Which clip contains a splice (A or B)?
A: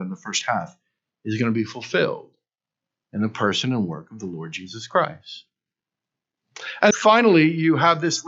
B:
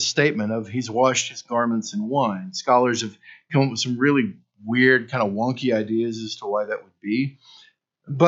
A